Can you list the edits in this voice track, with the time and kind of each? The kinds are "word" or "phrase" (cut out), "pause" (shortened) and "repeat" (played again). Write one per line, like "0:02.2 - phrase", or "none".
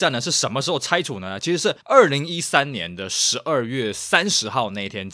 0:01.8 - pause